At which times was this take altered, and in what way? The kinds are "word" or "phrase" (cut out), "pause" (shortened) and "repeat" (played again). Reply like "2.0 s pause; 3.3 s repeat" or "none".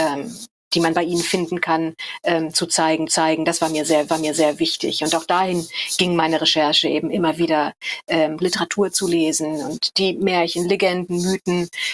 3.1 s repeat; 4.1 s repeat; 8.4 s word